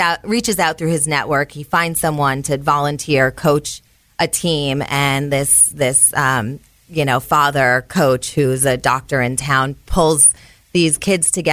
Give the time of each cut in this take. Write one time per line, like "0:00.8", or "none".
none